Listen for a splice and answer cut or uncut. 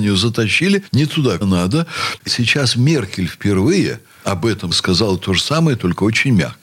cut